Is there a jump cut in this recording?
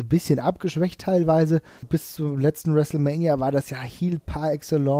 yes; 1 cut; at 1.8 s

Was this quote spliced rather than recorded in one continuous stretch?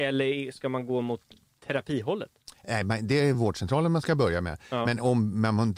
no; 0 cuts

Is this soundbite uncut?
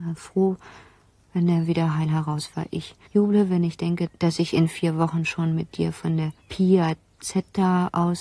no; 2 cuts; at 3.0 s, 6.4 s

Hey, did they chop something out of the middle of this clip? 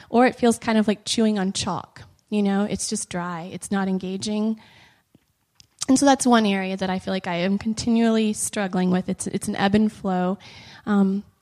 no; 0 cuts

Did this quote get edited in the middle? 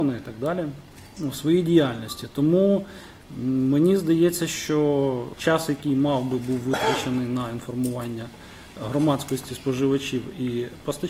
no; 0 cuts

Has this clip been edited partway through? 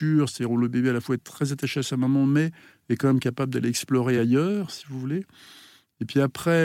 no; 0 cuts

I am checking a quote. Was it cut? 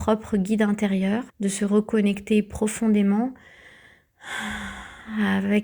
yes; 1 cut; at 1.3 s

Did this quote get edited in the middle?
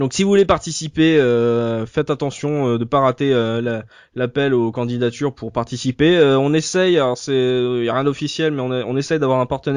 no; 0 cuts

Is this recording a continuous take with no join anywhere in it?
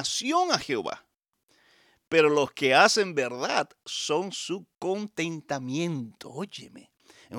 yes; 0 cuts

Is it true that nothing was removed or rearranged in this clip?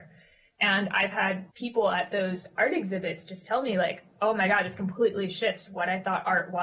no; 1 cut; at 1.5 s

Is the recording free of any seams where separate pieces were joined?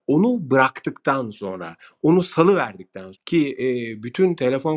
no; 1 cut; at 3.1 s

